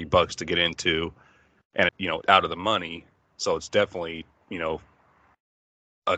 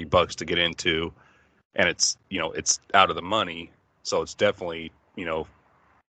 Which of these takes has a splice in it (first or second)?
first